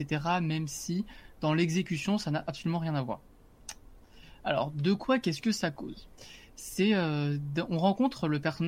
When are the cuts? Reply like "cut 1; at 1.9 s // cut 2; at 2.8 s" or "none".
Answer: none